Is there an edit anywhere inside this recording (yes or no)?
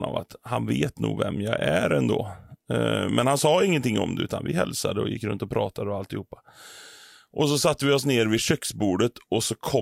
no